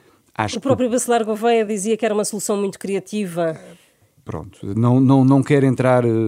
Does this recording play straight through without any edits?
yes; 0 cuts

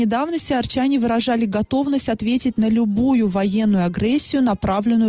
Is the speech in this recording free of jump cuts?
yes; 0 cuts

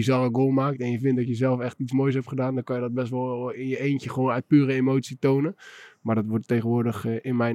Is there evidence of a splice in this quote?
no; 0 cuts

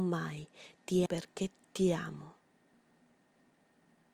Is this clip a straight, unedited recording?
no; 1 cut; at 1.1 s

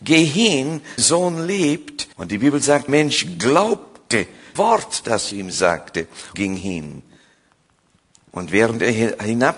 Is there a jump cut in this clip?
yes; 6 cuts; at 1.0 s, 2.1 s, 2.9 s, 4.6 s, 5.3 s, 6.3 s

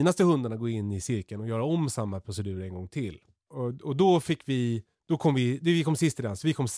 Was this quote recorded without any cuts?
no; 1 cut; at 4.9 s

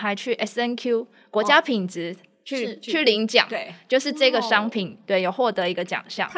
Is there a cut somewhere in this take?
no; 0 cuts

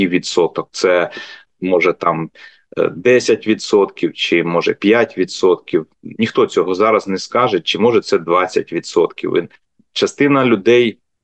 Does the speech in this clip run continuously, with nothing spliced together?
yes; 0 cuts

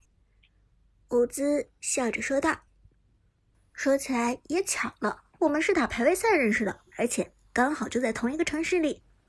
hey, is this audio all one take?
no; 2 cuts; at 5.3 s, 6.9 s

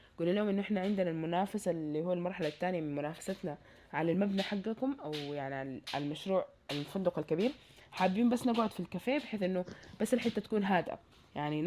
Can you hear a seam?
no; 0 cuts

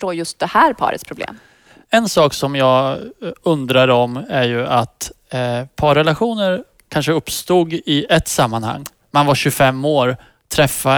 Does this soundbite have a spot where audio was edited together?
no; 0 cuts

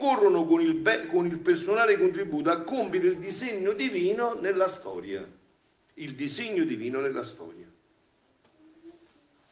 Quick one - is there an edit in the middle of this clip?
no; 0 cuts

